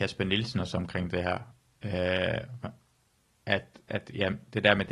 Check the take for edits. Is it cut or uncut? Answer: uncut